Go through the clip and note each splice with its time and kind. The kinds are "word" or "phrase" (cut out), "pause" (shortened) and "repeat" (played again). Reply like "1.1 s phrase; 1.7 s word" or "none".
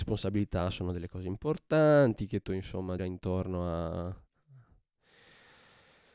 2.4 s word; 3.0 s word